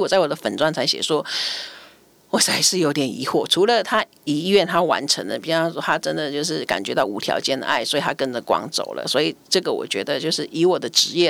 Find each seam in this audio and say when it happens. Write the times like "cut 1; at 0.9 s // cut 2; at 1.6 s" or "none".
none